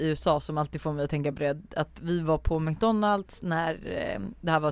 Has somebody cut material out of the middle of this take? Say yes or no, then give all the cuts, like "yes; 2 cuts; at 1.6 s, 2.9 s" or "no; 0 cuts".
no; 0 cuts